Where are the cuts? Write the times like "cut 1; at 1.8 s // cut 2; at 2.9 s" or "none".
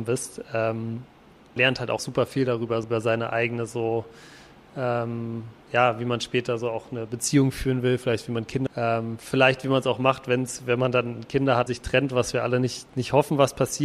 cut 1; at 1.6 s // cut 2; at 2.0 s // cut 3; at 2.8 s // cut 4; at 5.6 s // cut 5; at 8.7 s // cut 6; at 11.7 s